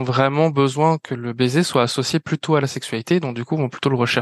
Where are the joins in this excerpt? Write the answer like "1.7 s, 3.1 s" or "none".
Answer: none